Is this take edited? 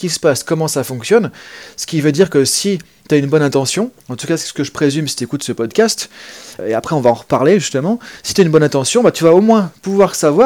yes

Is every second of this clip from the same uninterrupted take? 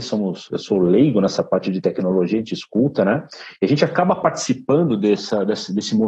yes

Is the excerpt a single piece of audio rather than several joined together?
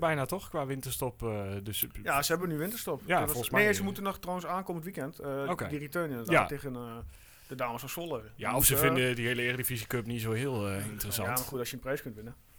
yes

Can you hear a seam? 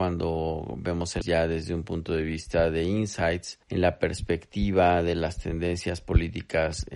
yes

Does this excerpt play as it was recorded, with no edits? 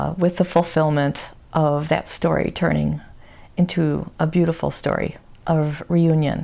yes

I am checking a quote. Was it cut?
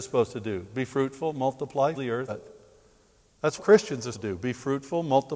yes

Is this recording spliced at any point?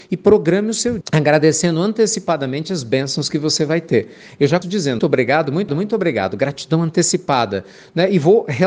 yes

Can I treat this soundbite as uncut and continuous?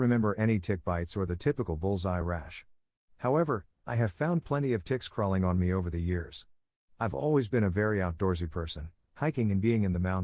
yes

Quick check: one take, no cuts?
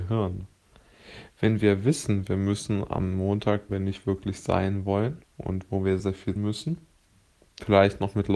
no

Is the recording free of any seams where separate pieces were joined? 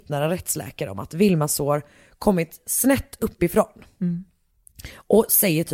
yes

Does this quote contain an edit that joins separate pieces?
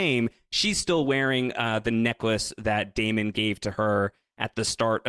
no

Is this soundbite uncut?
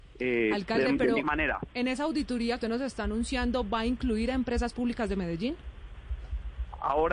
no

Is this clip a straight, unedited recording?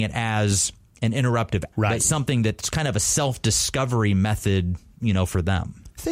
no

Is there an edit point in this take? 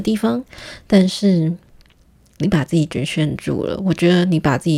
no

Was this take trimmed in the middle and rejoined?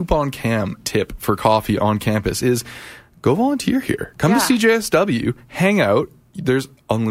no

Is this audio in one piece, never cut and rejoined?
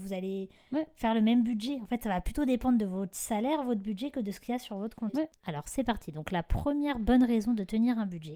yes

